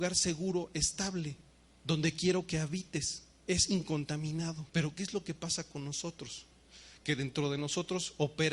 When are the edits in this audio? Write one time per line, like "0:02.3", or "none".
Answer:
0:01.6
0:04.7